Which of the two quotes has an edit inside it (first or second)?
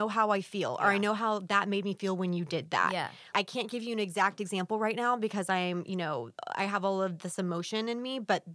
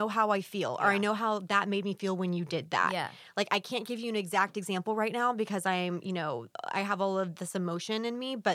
first